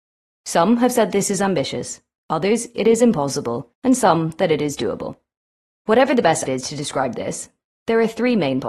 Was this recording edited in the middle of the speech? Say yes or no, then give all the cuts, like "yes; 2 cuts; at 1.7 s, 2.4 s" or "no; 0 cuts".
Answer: yes; 3 cuts; at 3.7 s, 5.4 s, 6.5 s